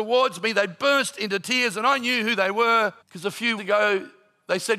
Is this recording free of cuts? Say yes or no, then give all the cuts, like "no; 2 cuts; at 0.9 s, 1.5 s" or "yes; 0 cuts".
no; 2 cuts; at 3.0 s, 3.6 s